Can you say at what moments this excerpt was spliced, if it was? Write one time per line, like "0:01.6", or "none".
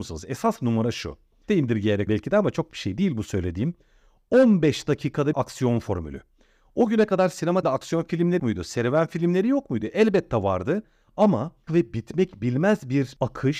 0:01.5
0:02.1
0:02.7
0:05.3
0:07.6
0:08.4
0:11.7